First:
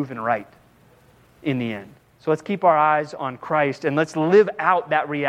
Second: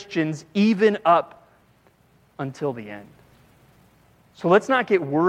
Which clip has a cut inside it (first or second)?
first